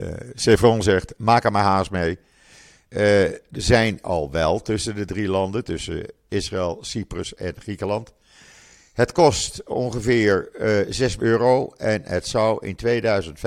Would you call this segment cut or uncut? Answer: cut